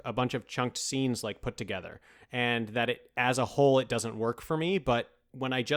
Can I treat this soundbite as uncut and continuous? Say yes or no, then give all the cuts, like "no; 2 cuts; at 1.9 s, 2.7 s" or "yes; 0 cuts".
yes; 0 cuts